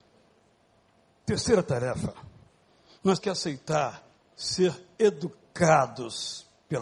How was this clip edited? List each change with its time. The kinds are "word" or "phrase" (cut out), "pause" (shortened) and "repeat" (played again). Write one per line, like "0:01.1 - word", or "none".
0:03.2 - word